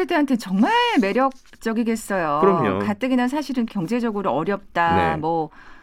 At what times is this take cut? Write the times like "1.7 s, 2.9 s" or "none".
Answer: 3.7 s